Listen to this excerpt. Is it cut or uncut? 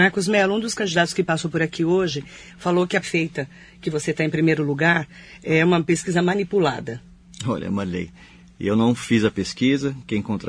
cut